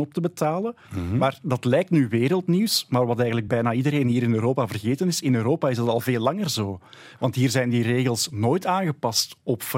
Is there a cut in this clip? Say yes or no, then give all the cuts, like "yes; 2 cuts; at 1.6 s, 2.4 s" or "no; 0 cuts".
no; 0 cuts